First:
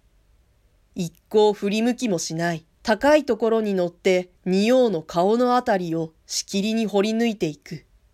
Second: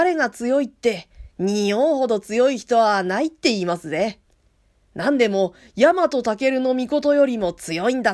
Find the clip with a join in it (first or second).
first